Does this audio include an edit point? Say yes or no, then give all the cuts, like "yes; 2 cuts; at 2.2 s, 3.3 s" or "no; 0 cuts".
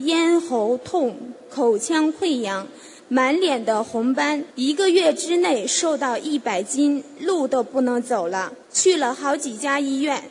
yes; 2 cuts; at 4.5 s, 8.6 s